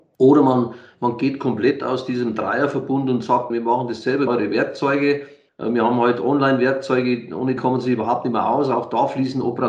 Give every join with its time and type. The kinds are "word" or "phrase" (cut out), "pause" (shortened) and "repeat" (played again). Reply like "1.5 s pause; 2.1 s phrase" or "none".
3.5 s word; 4.3 s phrase; 5.5 s pause; 7.6 s word